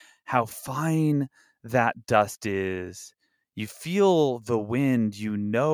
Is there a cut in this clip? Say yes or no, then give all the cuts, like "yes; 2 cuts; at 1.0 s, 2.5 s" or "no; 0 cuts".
no; 0 cuts